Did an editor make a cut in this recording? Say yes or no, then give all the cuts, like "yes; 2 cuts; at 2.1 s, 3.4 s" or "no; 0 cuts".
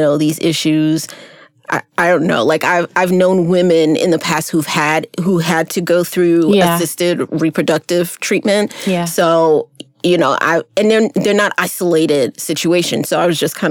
no; 0 cuts